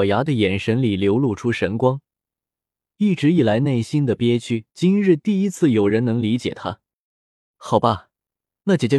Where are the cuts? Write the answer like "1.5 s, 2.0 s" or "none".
4.7 s